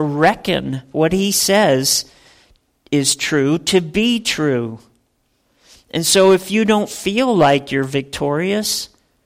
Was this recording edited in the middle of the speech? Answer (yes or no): no